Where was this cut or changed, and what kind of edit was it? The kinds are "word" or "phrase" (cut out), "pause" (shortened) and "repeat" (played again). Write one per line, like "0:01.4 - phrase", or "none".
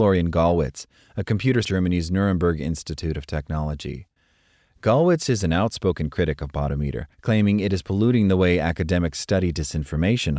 0:01.6 - phrase
0:07.1 - pause